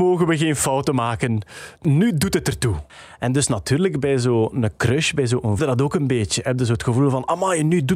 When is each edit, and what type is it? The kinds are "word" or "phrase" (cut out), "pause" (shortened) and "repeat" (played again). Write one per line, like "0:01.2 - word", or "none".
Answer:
0:05.6 - phrase